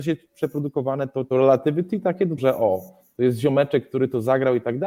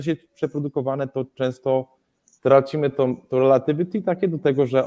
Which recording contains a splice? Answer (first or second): first